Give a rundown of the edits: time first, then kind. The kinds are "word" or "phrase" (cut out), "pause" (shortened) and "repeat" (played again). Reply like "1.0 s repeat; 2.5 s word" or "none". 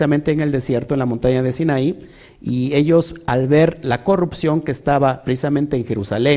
none